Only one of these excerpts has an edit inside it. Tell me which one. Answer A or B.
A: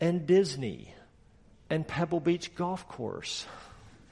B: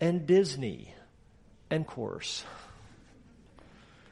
B